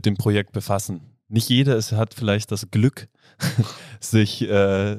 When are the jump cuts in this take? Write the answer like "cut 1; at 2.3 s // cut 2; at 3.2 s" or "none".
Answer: none